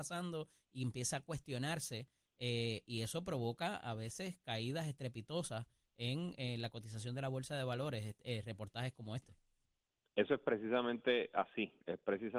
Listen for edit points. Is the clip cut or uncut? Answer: uncut